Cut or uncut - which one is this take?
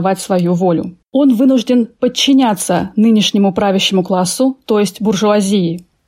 cut